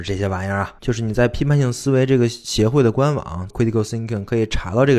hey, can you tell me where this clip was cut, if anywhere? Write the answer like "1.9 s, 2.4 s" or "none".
3.5 s